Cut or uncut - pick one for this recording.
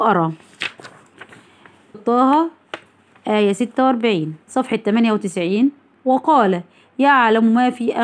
cut